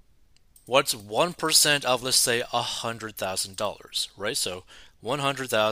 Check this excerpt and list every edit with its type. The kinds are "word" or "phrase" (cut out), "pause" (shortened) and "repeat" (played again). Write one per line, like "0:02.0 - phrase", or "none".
none